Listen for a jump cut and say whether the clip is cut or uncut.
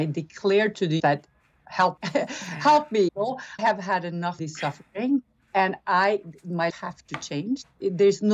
cut